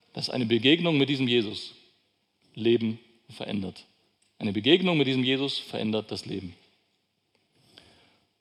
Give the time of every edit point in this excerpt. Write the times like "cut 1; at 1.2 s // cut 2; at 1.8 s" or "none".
cut 1; at 4.2 s